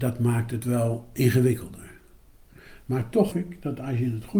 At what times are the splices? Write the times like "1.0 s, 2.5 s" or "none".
3.3 s